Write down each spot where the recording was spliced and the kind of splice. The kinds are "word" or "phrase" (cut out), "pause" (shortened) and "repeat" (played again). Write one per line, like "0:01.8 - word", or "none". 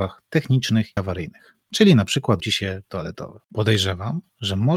0:01.0 - word
0:01.6 - pause
0:02.4 - phrase
0:02.9 - word
0:03.4 - pause